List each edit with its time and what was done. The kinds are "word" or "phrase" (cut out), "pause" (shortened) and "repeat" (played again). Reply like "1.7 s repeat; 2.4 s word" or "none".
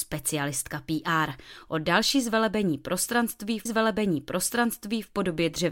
3.7 s repeat